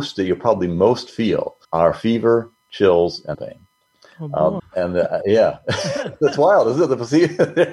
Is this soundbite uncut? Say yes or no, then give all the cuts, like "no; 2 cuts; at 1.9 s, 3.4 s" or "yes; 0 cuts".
no; 3 cuts; at 1.6 s, 3.3 s, 4.6 s